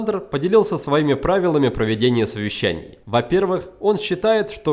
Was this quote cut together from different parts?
yes; 1 cut; at 3.0 s

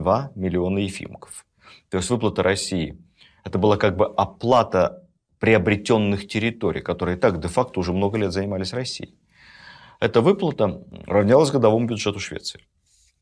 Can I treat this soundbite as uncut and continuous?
yes; 0 cuts

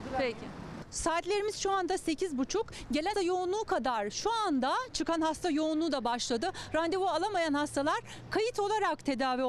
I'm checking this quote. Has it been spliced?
yes; 1 cut; at 3.1 s

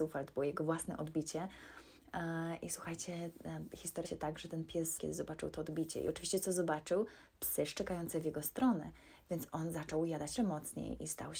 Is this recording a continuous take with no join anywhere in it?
no; 3 cuts; at 4.0 s, 5.0 s, 10.4 s

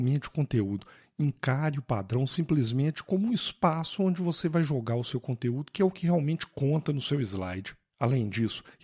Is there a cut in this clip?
no; 0 cuts

